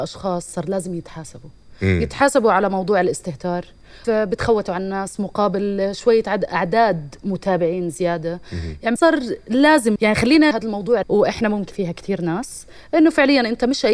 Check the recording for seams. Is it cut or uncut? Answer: cut